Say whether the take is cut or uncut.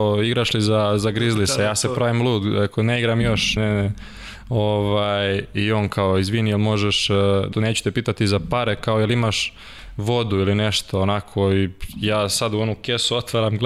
cut